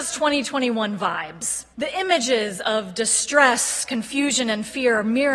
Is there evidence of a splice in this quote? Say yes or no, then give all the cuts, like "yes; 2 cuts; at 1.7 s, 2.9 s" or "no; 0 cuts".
yes; 1 cut; at 1.7 s